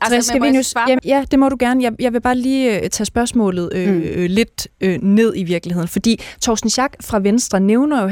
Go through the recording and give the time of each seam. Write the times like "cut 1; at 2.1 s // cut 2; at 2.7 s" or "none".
cut 1; at 1.0 s